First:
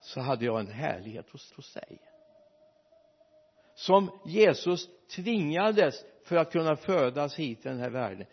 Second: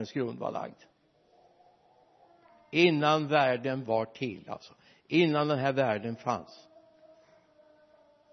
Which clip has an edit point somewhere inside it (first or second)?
first